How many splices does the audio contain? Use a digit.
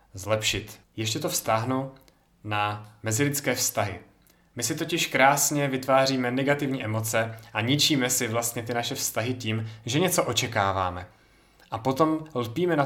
0